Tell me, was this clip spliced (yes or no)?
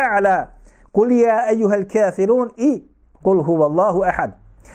no